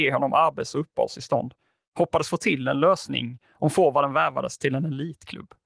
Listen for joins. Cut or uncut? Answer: uncut